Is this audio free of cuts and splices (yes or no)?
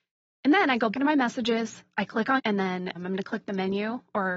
no